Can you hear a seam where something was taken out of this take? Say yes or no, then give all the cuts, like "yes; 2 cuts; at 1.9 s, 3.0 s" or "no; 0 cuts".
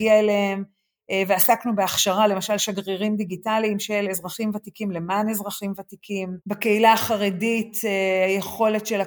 yes; 1 cut; at 6.4 s